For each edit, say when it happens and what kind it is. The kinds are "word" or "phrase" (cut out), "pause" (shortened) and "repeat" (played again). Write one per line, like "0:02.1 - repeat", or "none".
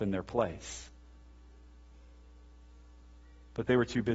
none